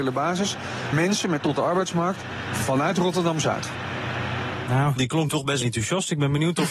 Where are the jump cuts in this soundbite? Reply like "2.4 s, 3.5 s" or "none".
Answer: 0.9 s, 1.4 s, 5.0 s, 5.3 s, 5.6 s